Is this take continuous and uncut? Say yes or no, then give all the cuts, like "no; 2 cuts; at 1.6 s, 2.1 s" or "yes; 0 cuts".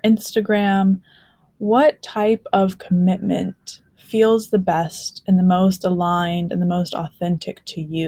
no; 1 cut; at 3.9 s